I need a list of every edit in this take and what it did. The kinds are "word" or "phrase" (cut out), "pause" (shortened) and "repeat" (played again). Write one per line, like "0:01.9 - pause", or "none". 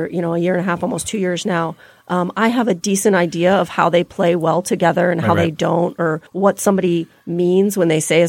0:06.3 - pause